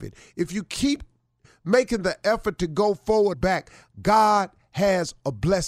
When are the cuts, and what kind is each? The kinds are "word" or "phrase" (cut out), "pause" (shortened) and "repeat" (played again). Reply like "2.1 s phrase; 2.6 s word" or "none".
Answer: 3.3 s phrase

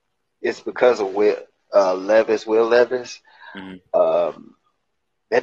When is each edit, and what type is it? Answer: none

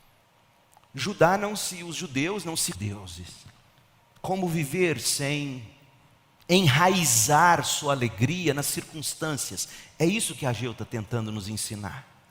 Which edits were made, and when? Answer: 2.7 s phrase; 4.0 s pause

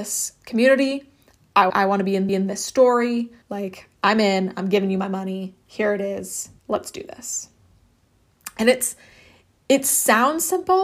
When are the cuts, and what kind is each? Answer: 1.7 s word; 2.3 s repeat; 3.4 s pause; 6.6 s pause

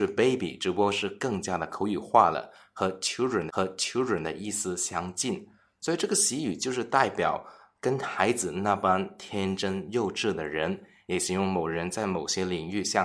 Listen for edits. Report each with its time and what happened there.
3.5 s repeat

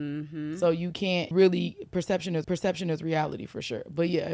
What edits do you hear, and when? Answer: 1.3 s word; 2.4 s repeat

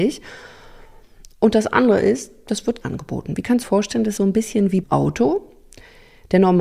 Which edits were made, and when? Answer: 1.3 s pause; 2.8 s word; 3.6 s phrase; 4.2 s word; 4.8 s phrase

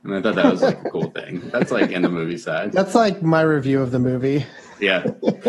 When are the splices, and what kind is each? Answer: none

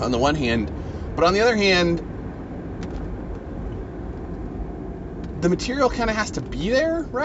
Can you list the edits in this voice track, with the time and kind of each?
none

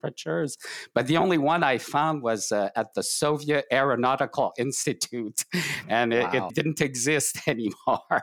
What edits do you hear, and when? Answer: 6.5 s word

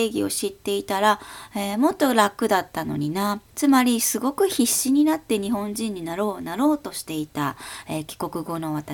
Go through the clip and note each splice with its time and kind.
3.5 s pause

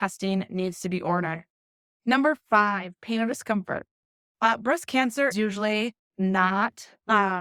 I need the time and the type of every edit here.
5.3 s word

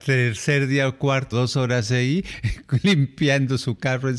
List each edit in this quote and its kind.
1.3 s phrase

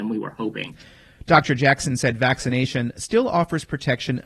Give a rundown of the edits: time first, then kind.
none

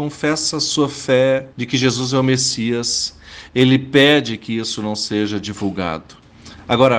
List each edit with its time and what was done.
1.5 s pause

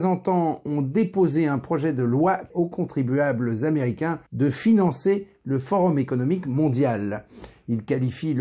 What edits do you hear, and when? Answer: 2.5 s phrase; 4.3 s pause

